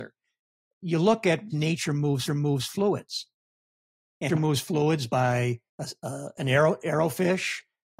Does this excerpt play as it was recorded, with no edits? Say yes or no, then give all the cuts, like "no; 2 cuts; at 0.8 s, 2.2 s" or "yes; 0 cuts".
no; 4 cuts; at 1.5 s, 2.3 s, 4.3 s, 5.7 s